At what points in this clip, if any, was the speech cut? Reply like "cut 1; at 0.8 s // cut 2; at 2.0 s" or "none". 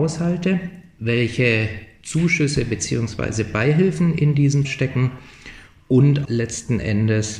cut 1; at 4.6 s // cut 2; at 6.2 s